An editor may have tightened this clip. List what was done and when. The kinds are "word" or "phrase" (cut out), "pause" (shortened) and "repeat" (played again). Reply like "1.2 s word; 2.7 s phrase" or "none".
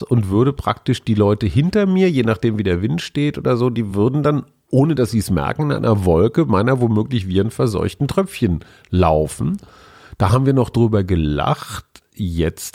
none